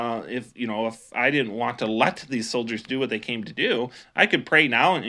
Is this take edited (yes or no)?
no